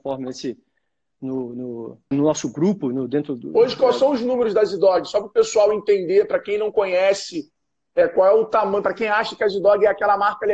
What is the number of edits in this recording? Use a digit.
1